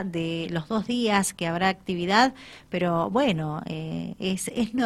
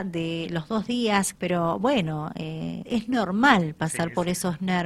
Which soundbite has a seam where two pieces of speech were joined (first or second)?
second